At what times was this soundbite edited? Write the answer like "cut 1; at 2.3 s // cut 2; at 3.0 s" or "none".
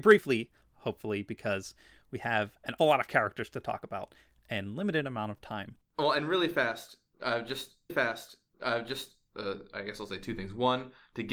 cut 1; at 2.8 s // cut 2; at 5.9 s // cut 3; at 7.9 s